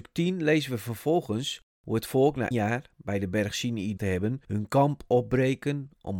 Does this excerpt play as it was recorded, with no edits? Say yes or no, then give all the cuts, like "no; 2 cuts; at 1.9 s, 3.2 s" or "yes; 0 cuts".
no; 2 cuts; at 2.5 s, 4.0 s